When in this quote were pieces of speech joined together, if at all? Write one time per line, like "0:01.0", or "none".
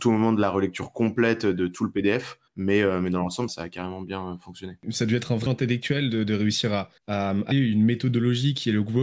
0:02.5
0:03.5
0:05.5
0:07.0
0:07.5